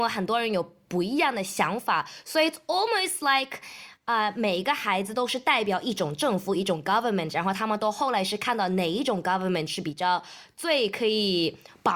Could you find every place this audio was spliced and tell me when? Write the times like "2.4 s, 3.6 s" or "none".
none